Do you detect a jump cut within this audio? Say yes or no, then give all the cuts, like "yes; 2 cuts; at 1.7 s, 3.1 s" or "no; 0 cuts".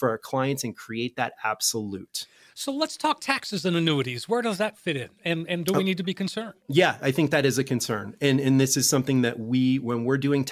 yes; 1 cut; at 6.6 s